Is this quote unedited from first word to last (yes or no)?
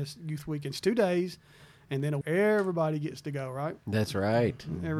no